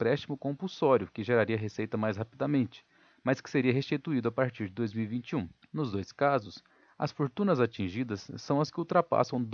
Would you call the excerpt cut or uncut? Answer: uncut